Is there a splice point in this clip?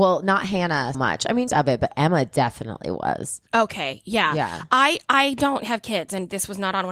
yes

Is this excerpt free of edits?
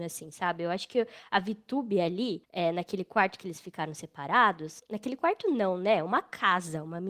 yes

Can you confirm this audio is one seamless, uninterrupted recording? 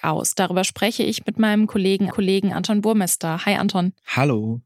no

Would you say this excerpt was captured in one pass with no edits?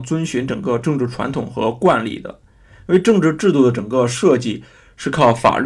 yes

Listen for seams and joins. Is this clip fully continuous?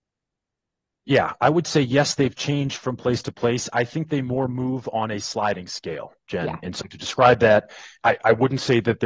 yes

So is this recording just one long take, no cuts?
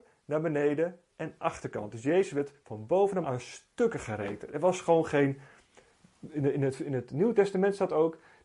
no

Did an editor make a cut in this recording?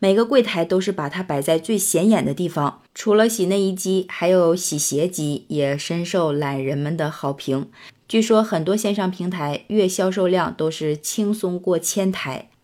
yes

